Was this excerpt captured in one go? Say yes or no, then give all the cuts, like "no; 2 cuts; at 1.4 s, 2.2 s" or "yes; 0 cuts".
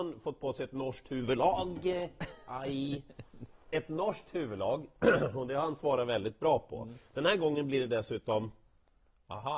yes; 0 cuts